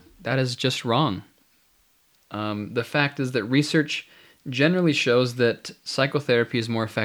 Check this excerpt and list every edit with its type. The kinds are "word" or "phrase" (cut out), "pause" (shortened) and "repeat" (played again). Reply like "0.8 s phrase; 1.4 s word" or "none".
none